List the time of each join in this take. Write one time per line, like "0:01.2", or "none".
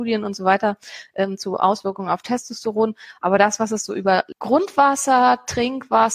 none